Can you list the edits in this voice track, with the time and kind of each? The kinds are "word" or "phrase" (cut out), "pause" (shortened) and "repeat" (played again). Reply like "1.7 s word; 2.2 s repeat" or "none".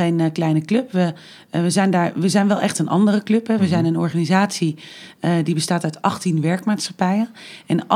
none